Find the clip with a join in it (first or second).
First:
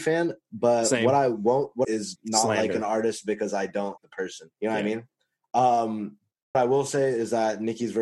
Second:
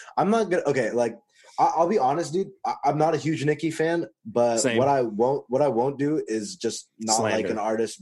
first